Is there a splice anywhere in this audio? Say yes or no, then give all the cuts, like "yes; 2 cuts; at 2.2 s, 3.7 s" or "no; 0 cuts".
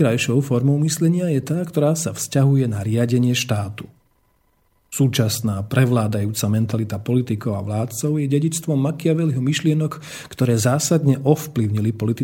no; 0 cuts